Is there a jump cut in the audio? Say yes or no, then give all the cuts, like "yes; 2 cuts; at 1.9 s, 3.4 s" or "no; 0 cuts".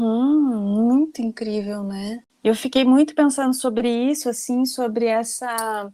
no; 0 cuts